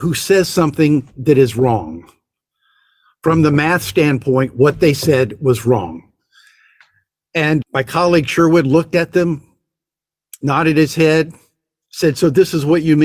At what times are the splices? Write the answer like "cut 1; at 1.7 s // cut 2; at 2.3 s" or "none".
cut 1; at 7.6 s